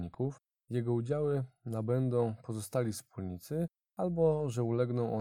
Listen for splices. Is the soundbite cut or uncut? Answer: uncut